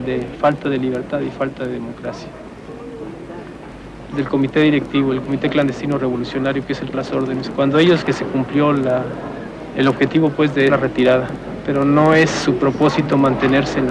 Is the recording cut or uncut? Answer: cut